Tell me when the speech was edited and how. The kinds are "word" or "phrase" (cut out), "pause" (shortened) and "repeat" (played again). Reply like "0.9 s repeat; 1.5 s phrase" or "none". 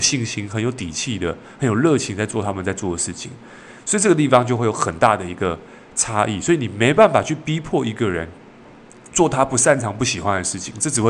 none